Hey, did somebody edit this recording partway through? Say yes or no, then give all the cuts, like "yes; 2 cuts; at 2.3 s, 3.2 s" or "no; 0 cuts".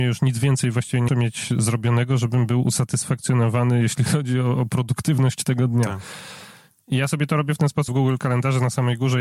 yes; 2 cuts; at 1.1 s, 7.9 s